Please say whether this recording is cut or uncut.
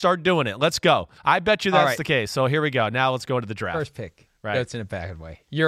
cut